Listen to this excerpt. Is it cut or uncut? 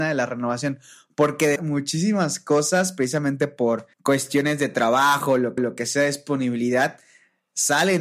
cut